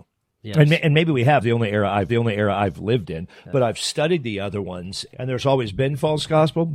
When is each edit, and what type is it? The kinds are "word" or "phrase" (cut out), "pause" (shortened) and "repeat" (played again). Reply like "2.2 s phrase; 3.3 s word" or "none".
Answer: 1.4 s phrase; 2.1 s repeat; 5.1 s word